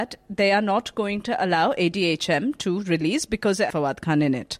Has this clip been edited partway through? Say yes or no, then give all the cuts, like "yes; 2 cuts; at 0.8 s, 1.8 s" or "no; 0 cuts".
yes; 1 cut; at 3.7 s